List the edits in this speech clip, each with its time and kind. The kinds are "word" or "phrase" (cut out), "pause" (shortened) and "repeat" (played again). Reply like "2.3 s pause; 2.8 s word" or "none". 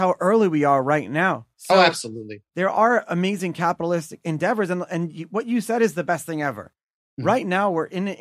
1.5 s pause; 2.5 s pause